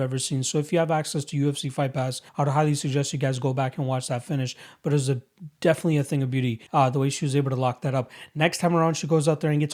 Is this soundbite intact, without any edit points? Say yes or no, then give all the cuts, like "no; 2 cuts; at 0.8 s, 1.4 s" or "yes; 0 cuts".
no; 2 cuts; at 2.3 s, 6.7 s